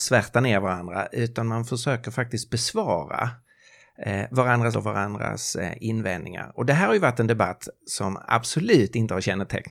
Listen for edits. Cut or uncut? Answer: cut